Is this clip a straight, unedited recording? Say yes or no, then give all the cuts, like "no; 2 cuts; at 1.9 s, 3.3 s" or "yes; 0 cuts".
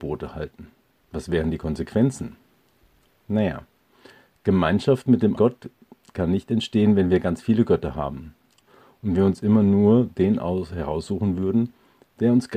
no; 1 cut; at 5.4 s